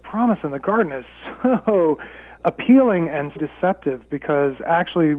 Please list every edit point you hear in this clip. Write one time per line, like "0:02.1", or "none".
0:02.4
0:03.4